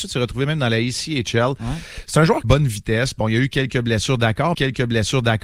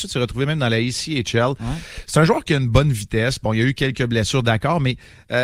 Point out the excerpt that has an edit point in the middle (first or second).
first